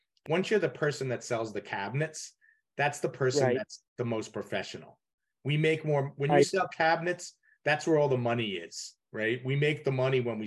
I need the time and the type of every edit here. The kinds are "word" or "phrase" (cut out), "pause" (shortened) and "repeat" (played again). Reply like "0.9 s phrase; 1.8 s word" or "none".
none